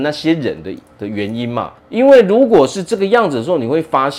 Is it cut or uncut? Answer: cut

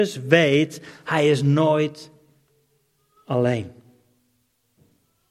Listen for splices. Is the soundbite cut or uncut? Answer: uncut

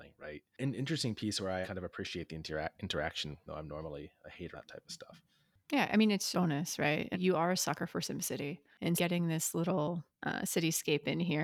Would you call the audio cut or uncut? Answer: cut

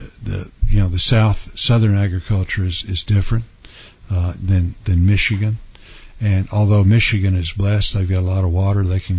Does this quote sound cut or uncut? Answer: uncut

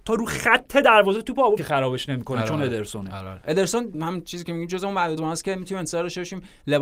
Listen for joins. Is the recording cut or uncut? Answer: cut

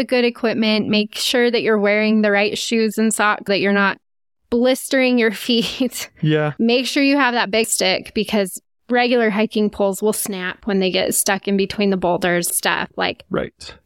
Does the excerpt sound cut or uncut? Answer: cut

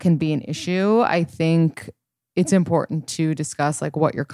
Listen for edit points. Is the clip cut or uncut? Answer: uncut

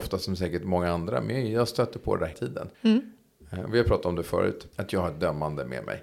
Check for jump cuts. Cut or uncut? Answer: cut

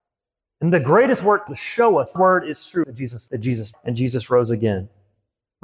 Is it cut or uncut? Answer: cut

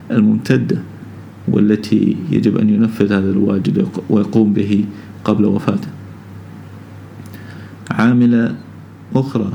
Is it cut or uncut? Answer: uncut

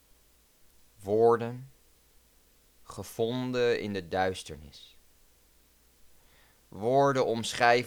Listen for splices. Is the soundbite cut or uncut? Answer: uncut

